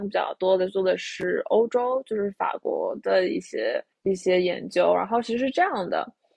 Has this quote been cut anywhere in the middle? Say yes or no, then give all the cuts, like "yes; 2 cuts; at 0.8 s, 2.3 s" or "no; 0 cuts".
yes; 1 cut; at 3.9 s